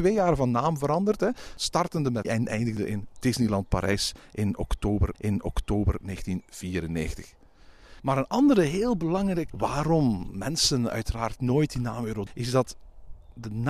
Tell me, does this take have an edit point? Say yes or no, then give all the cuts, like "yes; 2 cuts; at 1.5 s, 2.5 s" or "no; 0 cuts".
yes; 4 cuts; at 2.2 s, 5.1 s, 9.5 s, 12.3 s